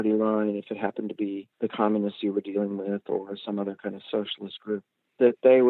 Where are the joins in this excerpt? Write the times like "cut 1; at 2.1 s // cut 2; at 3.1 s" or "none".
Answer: none